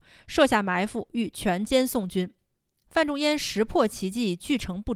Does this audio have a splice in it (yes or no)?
no